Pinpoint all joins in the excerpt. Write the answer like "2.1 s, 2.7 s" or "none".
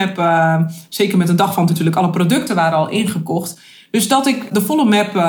1.7 s